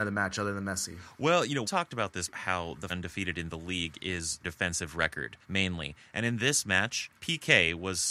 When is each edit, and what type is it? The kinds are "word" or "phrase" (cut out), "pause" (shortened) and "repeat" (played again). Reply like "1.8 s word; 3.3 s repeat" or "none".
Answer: 1.6 s word; 2.3 s word; 2.9 s phrase; 4.4 s phrase; 5.4 s pause; 7.2 s pause